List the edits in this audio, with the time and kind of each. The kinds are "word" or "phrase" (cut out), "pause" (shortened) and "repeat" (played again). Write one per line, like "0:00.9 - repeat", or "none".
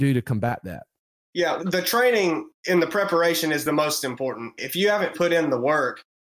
0:01.6 - word
0:02.6 - pause
0:05.1 - word